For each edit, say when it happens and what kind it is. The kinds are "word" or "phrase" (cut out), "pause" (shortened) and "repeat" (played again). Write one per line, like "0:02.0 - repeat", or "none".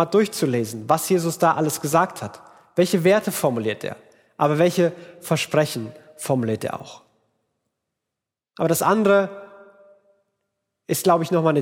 none